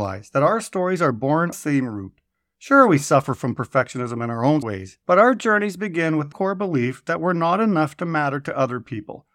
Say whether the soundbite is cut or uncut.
cut